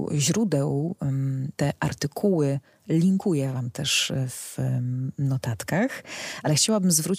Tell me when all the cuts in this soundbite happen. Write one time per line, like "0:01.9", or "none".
0:01.5